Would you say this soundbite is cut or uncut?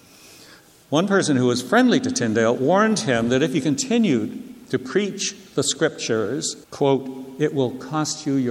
cut